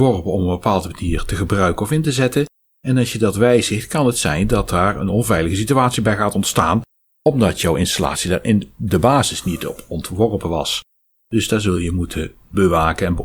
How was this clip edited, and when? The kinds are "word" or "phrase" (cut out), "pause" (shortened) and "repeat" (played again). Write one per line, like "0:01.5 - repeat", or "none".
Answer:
none

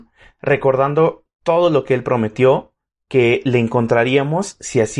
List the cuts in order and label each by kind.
none

